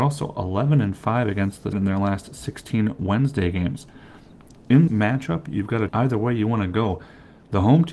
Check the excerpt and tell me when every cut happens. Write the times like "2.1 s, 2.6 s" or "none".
1.7 s, 4.9 s, 5.9 s